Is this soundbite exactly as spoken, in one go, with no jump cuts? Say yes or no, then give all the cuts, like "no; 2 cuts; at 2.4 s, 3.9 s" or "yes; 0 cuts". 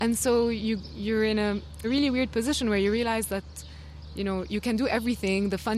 no; 1 cut; at 1.8 s